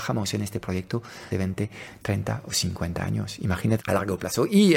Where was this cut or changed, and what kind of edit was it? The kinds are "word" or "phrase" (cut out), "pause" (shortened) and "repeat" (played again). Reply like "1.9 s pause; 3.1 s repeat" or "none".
1.3 s word; 3.8 s phrase